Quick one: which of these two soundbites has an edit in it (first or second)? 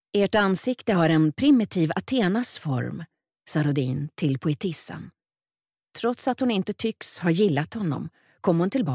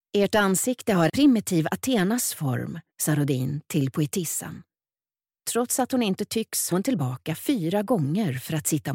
second